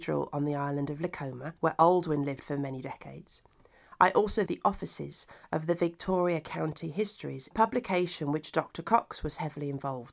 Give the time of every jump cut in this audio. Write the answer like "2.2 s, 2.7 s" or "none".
1.6 s, 4.5 s, 7.5 s